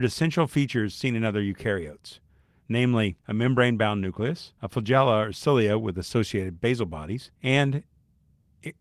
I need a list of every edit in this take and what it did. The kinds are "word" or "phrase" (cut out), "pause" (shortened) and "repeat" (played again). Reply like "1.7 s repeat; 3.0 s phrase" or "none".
3.2 s pause; 4.6 s pause; 7.3 s pause